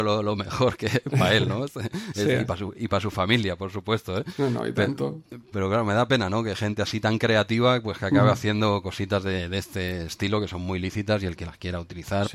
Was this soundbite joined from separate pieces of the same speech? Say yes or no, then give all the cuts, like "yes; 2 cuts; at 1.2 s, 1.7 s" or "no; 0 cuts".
yes; 1 cut; at 5.5 s